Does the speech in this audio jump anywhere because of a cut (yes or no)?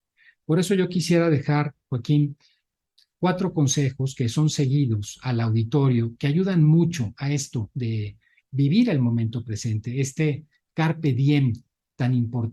no